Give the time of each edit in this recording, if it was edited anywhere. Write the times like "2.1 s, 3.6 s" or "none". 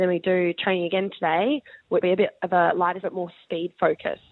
2.0 s, 3.0 s